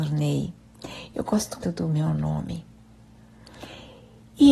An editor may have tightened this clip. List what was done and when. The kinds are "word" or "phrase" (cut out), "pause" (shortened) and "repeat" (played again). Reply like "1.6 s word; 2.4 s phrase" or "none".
1.6 s word